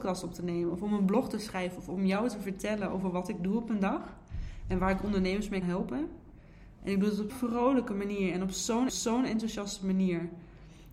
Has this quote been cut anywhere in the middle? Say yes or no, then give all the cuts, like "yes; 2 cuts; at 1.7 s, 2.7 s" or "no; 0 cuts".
yes; 3 cuts; at 5.6 s, 7.3 s, 8.9 s